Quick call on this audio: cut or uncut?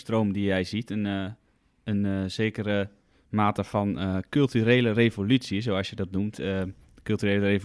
uncut